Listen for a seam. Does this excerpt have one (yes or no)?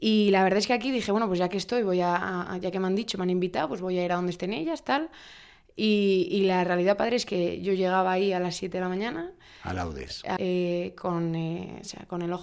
yes